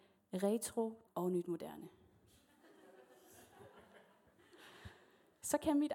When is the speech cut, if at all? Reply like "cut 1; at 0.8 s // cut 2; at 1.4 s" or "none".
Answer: cut 1; at 1.1 s